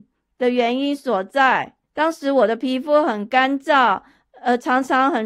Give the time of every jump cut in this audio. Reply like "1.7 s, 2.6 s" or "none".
1.8 s